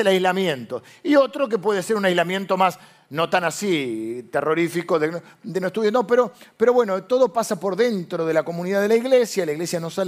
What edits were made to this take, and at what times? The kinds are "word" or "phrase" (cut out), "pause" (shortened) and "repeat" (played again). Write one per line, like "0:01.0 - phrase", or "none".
none